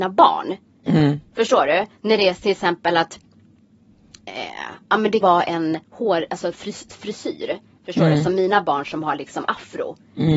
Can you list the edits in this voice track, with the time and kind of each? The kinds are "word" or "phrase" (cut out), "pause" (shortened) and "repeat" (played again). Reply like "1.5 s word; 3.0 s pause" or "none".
4.2 s pause; 5.2 s word; 5.8 s pause